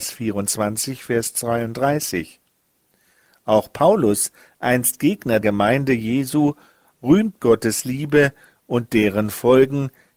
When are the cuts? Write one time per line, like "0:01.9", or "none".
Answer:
0:05.4
0:07.4